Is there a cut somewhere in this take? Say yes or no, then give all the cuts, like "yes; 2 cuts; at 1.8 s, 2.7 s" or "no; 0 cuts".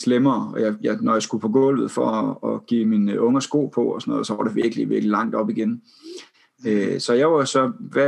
no; 0 cuts